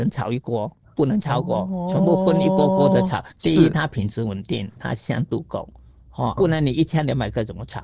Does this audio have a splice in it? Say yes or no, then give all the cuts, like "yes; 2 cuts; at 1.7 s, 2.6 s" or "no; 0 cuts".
yes; 3 cuts; at 3.3 s, 4.8 s, 6.4 s